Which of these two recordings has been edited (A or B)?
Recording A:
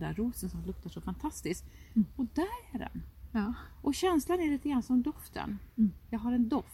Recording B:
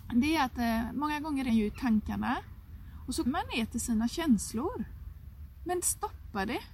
B